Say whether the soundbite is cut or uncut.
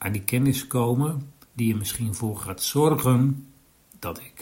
cut